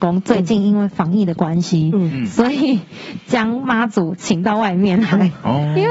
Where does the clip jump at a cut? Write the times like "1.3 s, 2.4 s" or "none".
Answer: none